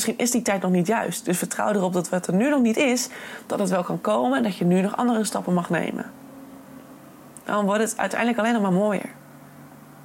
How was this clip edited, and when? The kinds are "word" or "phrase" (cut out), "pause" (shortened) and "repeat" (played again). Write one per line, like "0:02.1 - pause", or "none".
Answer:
none